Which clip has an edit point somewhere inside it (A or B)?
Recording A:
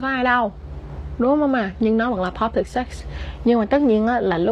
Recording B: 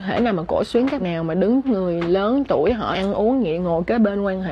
B